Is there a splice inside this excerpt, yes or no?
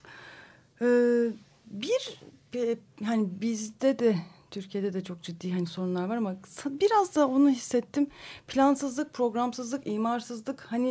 no